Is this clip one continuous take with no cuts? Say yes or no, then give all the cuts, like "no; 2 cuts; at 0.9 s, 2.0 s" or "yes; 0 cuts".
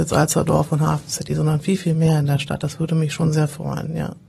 yes; 0 cuts